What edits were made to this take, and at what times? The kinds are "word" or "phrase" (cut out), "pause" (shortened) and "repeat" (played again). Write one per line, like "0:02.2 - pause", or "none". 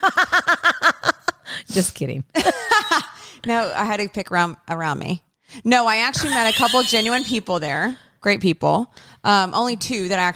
none